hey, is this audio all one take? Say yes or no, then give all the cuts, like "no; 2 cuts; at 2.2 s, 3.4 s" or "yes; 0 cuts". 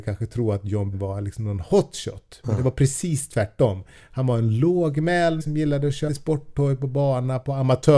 no; 3 cuts; at 0.9 s, 5.4 s, 6.1 s